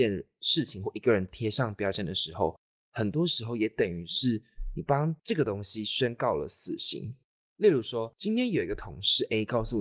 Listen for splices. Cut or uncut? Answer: uncut